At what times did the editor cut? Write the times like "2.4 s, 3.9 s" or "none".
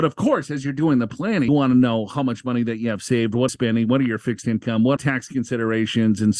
1.5 s, 3.5 s, 5.0 s